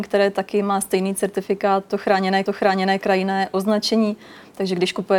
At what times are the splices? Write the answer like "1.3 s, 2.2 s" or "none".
2.5 s